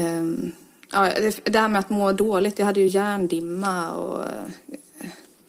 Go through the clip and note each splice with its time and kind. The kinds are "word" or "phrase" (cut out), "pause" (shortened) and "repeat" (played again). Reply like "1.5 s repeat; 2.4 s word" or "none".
none